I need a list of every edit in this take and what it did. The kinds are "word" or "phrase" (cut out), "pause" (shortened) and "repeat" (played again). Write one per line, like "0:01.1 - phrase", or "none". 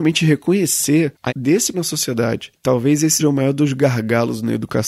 0:01.3 - word
0:01.7 - word
0:02.6 - pause
0:03.2 - word